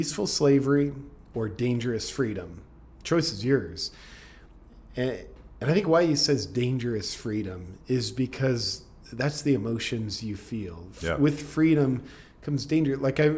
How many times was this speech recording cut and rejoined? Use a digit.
0